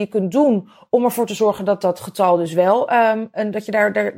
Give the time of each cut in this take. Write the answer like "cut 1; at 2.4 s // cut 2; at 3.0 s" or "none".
none